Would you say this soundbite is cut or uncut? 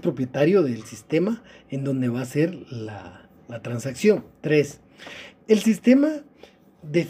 uncut